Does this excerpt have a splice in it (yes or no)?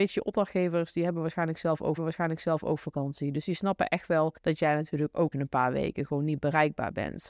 yes